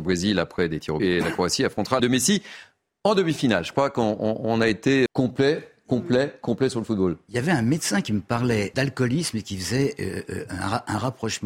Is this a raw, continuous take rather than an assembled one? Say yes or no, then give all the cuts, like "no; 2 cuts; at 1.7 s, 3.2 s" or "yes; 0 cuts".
no; 4 cuts; at 1.0 s, 2.0 s, 5.1 s, 8.7 s